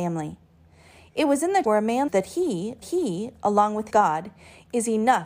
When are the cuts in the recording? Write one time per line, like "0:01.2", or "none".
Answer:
0:01.6
0:02.1
0:02.8
0:03.9